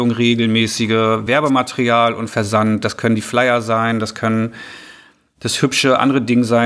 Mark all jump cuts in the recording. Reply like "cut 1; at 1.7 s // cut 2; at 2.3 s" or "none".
none